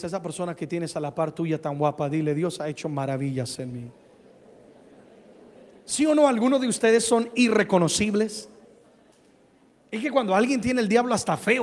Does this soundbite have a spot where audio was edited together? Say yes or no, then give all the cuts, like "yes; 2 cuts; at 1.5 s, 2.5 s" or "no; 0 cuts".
no; 0 cuts